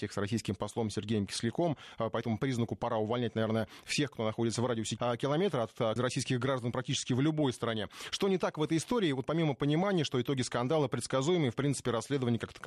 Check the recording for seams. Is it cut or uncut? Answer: cut